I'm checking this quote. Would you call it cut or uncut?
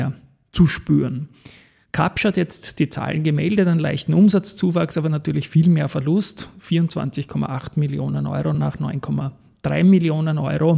uncut